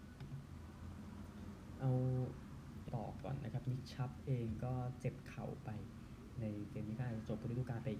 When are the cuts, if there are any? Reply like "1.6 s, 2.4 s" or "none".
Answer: 2.9 s